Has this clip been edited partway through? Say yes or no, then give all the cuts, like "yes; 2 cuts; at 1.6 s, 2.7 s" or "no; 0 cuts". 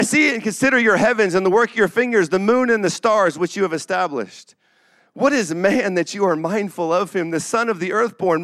no; 0 cuts